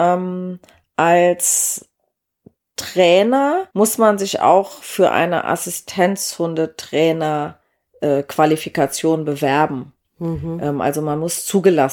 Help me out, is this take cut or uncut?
cut